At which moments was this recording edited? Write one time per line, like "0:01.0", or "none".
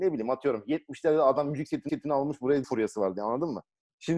0:01.9
0:02.6